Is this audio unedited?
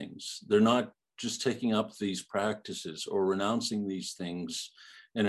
yes; 0 cuts

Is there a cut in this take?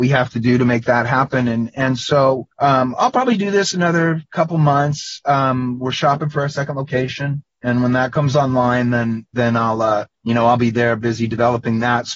yes; 2 cuts; at 2.5 s, 10.1 s

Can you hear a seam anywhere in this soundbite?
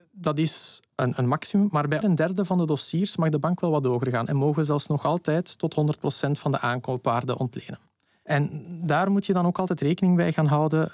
yes; 2 cuts; at 0.9 s, 2.0 s

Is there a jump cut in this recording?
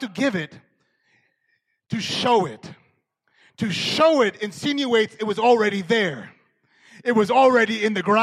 no; 0 cuts

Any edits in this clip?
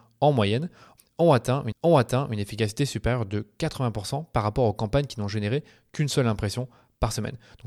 yes; 1 cut; at 1.7 s

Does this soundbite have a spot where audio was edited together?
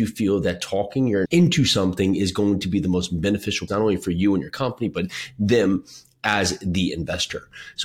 yes; 2 cuts; at 1.2 s, 3.7 s

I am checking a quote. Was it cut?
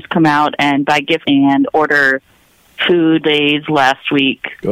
yes; 2 cuts; at 1.2 s, 3.2 s

